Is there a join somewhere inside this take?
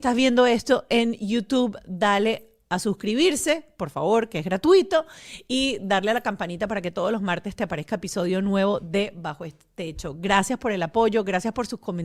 no; 0 cuts

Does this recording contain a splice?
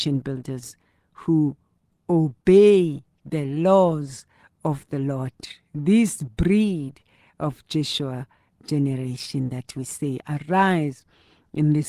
no; 0 cuts

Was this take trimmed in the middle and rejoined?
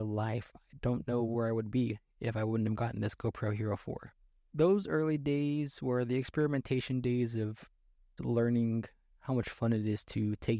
yes; 1 cut; at 8.2 s

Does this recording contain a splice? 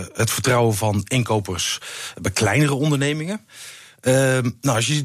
no; 0 cuts

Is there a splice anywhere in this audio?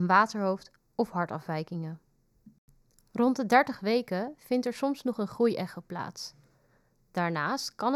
no; 0 cuts

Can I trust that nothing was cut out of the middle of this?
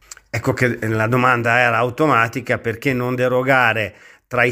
yes; 0 cuts

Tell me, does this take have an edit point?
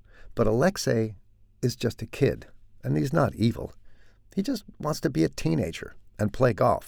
no; 0 cuts

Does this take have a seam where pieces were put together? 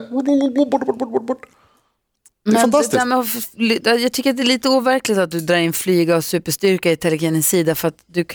no; 0 cuts

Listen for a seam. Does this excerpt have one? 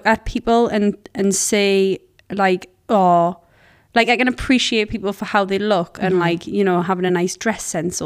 no; 0 cuts

